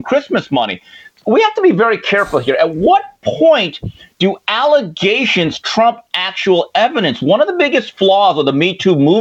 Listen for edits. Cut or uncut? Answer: uncut